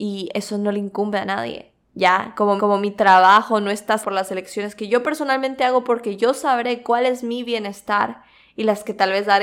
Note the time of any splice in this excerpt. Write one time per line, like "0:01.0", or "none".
0:01.8
0:02.6
0:04.0